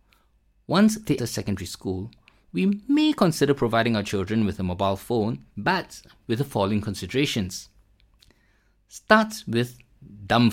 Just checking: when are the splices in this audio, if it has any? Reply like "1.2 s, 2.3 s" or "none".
1.2 s, 5.5 s